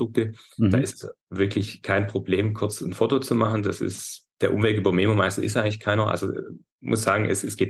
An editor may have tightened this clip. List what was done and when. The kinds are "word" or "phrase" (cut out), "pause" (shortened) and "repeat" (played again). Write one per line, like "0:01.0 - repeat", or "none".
0:04.3 - pause